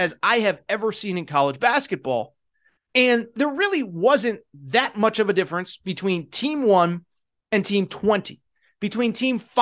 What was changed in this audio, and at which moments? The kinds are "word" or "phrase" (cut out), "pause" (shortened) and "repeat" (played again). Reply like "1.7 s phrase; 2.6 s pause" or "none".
none

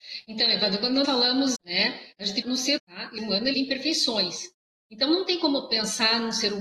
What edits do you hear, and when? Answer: 1.0 s word; 1.6 s phrase; 2.4 s word; 2.8 s word; 3.2 s phrase; 3.5 s phrase

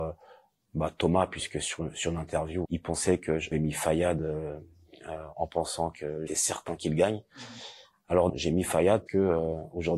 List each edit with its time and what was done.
2.7 s word; 3.5 s word; 5.3 s word; 6.3 s word; 8.3 s word; 9.1 s word

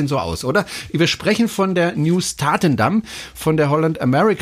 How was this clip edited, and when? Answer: none

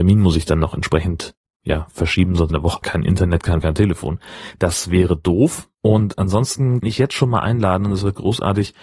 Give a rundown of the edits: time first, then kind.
1.5 s word; 2.5 s phrase; 2.8 s word; 3.6 s word; 5.7 s pause; 6.8 s word

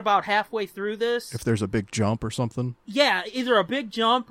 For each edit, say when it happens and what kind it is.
2.8 s pause

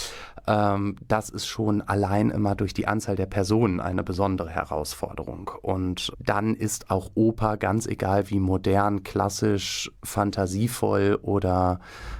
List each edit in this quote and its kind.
6.1 s word

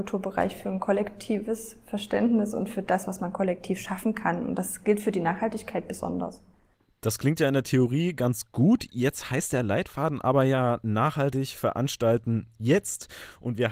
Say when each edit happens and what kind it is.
none

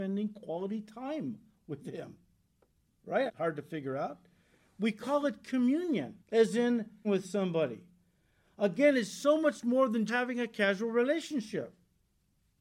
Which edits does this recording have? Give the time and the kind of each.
3.3 s phrase; 6.2 s pause; 7.0 s word; 10.1 s word

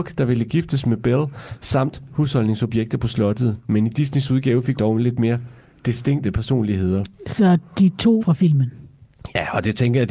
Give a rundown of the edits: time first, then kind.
2.1 s word; 4.7 s word; 8.2 s word

